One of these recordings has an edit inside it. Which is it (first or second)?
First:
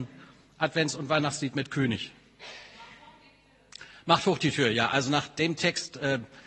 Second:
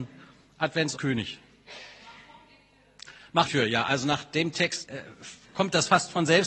second